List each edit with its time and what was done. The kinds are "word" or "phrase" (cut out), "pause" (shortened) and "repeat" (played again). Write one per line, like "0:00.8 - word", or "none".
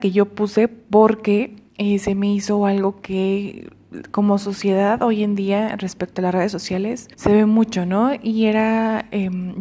0:01.7 - pause
0:07.1 - pause